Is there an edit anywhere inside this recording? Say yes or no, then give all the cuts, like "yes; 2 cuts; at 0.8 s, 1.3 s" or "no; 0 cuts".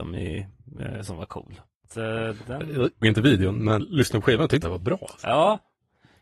yes; 3 cuts; at 3.0 s, 3.8 s, 4.6 s